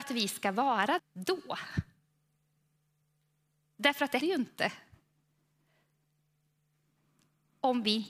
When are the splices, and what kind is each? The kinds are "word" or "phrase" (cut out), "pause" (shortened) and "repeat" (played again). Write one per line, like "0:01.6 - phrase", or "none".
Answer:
0:01.0 - word
0:04.2 - word